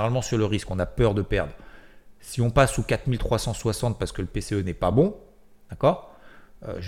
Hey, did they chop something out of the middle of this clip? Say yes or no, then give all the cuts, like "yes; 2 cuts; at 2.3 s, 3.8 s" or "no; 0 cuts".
no; 0 cuts